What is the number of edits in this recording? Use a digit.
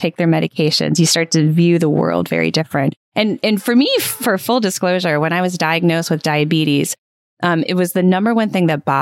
1